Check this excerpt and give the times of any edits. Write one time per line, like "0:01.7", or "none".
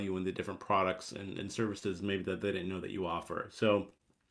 none